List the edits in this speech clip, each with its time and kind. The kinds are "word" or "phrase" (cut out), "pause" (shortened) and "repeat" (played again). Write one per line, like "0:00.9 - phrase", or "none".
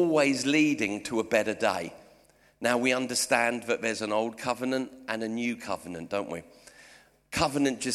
none